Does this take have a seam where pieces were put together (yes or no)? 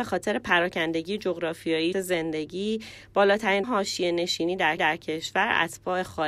yes